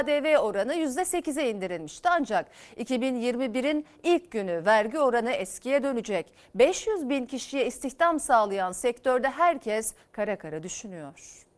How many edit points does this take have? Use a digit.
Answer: 0